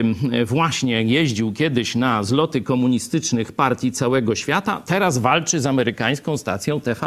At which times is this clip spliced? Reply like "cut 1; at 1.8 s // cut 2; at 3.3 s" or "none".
none